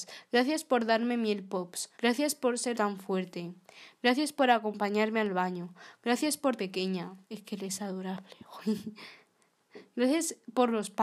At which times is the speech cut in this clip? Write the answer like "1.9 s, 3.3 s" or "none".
1.9 s, 2.7 s, 6.6 s, 7.2 s